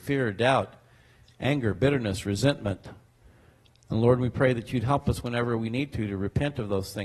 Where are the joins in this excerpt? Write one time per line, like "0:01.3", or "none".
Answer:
none